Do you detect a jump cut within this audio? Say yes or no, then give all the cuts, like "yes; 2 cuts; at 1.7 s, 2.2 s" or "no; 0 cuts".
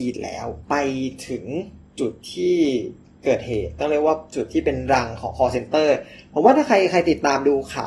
no; 0 cuts